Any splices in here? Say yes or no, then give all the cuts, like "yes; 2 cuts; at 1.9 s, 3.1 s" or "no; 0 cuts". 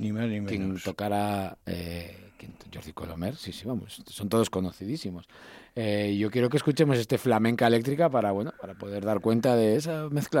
yes; 1 cut; at 1.6 s